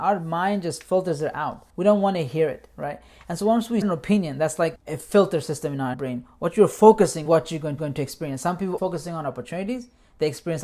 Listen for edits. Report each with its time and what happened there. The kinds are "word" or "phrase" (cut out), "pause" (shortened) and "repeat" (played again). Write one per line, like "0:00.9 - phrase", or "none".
0:01.7 - pause
0:03.8 - word
0:04.8 - word
0:05.9 - word
0:07.3 - phrase
0:07.8 - repeat
0:08.8 - word